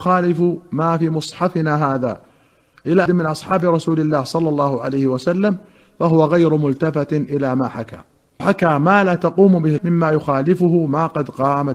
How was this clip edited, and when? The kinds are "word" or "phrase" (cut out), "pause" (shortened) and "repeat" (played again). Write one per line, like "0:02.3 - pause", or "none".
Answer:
0:03.1 - word
0:08.4 - word
0:09.8 - word